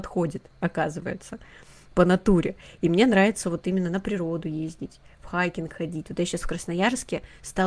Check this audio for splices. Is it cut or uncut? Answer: uncut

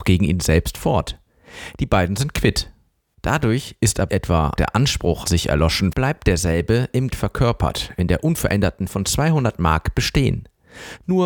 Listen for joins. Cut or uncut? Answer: cut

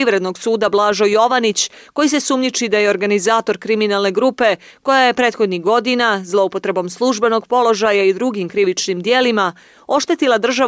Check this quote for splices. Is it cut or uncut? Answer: uncut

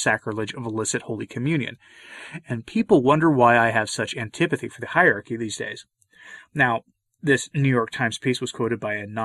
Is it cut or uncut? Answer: uncut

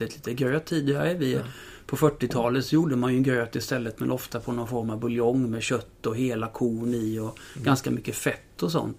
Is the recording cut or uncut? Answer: uncut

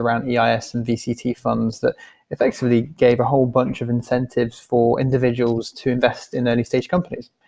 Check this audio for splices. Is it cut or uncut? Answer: uncut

